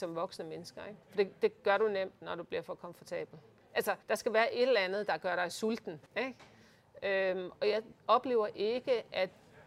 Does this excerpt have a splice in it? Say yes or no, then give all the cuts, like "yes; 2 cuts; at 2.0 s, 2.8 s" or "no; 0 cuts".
yes; 4 cuts; at 1.0 s, 4.0 s, 6.1 s, 8.0 s